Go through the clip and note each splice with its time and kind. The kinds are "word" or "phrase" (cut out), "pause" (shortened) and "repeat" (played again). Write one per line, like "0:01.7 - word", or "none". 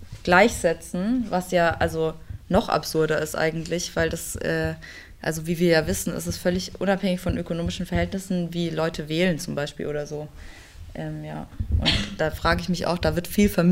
none

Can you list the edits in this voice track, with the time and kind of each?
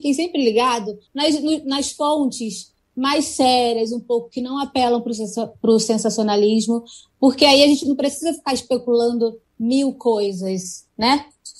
0:01.1 - pause

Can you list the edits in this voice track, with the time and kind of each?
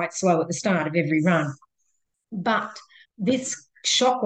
0:03.0 - word

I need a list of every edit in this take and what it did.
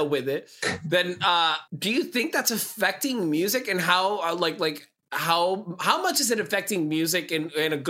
0:01.7 - pause

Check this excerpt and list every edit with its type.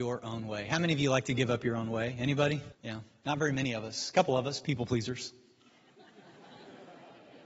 0:02.7 - pause

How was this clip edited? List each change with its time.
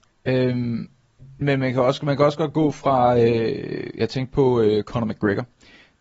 0:01.4 - word

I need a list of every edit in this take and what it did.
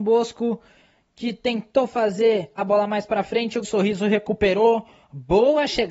0:02.6 - word
0:03.6 - word

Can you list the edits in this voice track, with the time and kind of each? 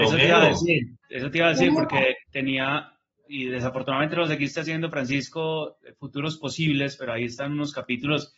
0:01.0 - pause
0:02.2 - pause

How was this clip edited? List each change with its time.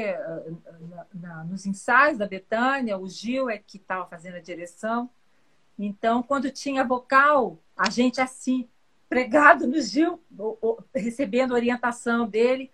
0:07.6 - pause
0:10.3 - pause

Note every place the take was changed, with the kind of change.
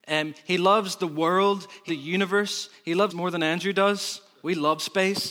0:01.9 - word
0:03.1 - word

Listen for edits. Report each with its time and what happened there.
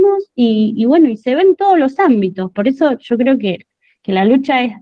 none

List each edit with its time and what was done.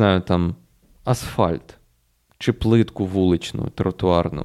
none

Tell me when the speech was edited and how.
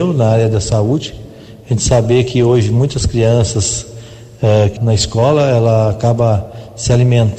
0:04.8 - word

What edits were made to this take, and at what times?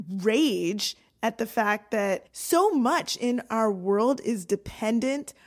0:02.3 - pause

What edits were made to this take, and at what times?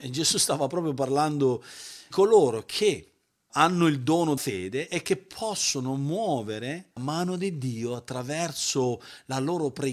0:02.1 - word
0:03.5 - word
0:04.4 - word
0:07.0 - word

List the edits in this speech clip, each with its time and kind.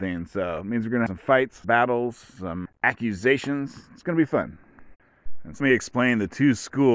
0:01.1 - word
0:01.6 - word
0:02.7 - word
0:05.6 - word

